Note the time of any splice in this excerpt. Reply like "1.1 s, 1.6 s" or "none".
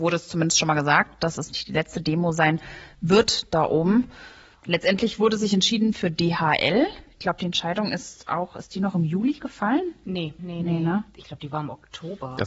10.4 s

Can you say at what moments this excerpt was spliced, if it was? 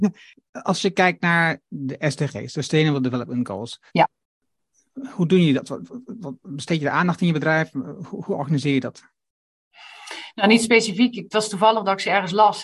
3.9 s

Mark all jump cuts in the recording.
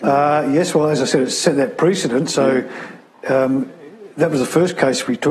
none

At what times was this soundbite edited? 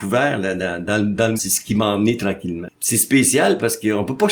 1.4 s

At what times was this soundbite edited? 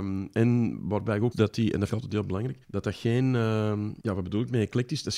1.3 s, 1.9 s, 2.6 s, 4.0 s

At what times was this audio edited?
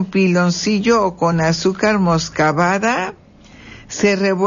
none

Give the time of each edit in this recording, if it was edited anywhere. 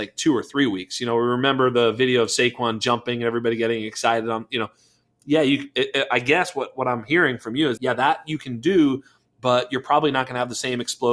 7.8 s

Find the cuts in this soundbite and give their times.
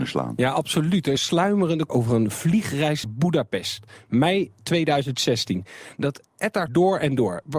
1.2 s, 1.9 s, 3.0 s, 6.7 s

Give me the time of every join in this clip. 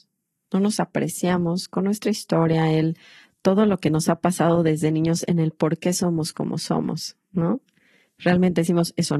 none

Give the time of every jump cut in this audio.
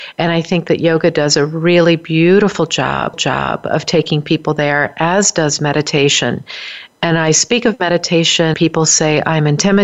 3.1 s, 8.5 s

